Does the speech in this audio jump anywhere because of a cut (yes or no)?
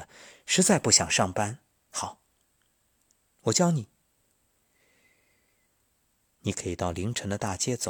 no